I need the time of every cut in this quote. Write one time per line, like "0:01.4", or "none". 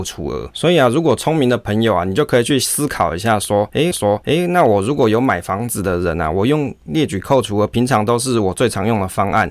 0:03.9